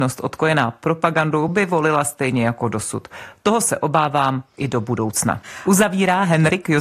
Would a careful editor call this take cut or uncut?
uncut